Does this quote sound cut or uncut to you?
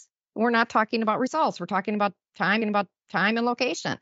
cut